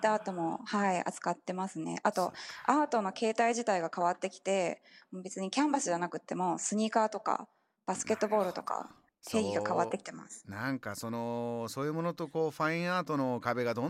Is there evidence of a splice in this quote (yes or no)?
no